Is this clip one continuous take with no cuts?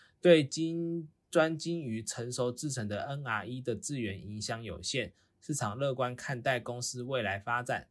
yes; 0 cuts

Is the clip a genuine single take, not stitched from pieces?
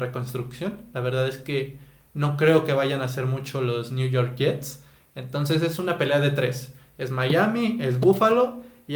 yes; 0 cuts

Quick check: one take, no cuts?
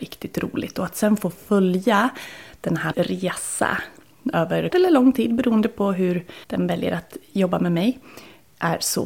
no; 3 cuts; at 2.9 s, 4.7 s, 6.4 s

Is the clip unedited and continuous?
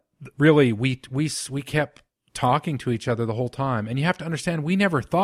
yes; 0 cuts

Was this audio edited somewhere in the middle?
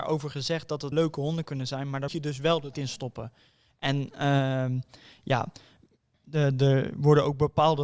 yes; 3 cuts; at 0.9 s, 2.1 s, 2.7 s

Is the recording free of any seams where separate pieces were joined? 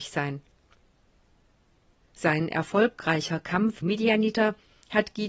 no; 1 cut; at 3.8 s

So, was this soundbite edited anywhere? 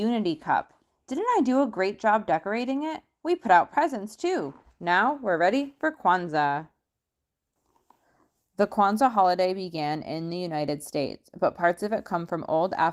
no; 0 cuts

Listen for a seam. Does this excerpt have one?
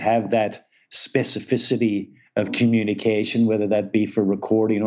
no; 0 cuts

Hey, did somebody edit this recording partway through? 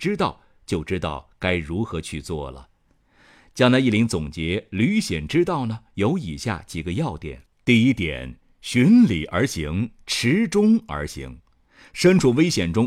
yes; 1 cut; at 7.5 s

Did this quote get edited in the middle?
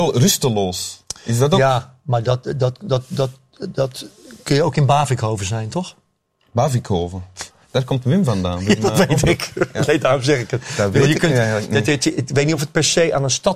no; 0 cuts

